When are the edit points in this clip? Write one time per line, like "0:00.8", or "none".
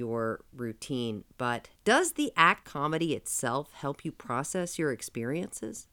0:01.7
0:02.6